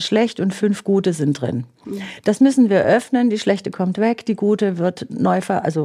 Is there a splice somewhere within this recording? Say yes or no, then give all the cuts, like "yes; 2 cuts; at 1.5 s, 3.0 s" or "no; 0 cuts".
no; 0 cuts